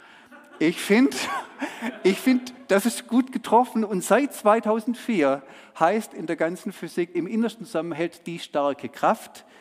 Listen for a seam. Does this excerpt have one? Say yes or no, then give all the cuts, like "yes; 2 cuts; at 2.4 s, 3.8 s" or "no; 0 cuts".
yes; 1 cut; at 7.1 s